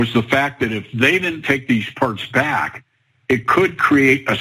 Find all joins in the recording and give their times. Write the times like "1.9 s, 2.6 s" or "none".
none